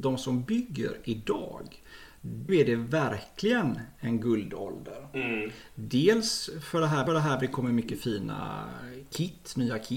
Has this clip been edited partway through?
yes; 2 cuts; at 2.5 s, 7.1 s

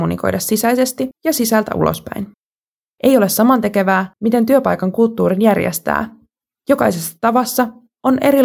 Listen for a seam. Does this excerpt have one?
no; 0 cuts

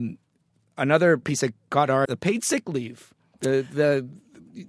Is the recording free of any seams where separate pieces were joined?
no; 2 cuts; at 1.2 s, 2.1 s

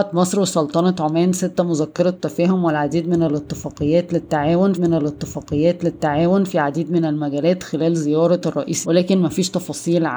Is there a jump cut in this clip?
yes; 2 cuts; at 4.7 s, 8.8 s

